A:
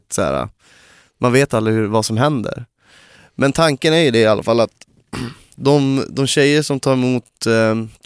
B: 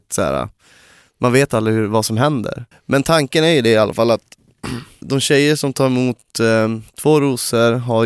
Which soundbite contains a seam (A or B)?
B